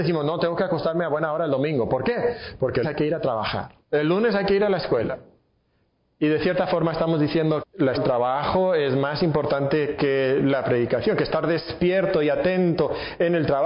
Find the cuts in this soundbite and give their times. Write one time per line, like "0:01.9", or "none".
0:02.8
0:03.8
0:07.6
0:07.9